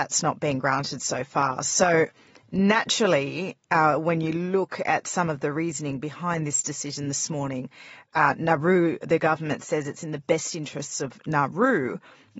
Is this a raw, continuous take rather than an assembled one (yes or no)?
yes